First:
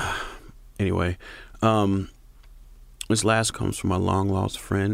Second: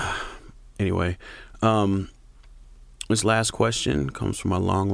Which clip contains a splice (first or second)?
first